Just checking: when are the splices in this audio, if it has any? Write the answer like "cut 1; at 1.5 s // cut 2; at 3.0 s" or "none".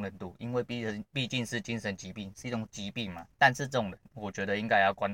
cut 1; at 3.3 s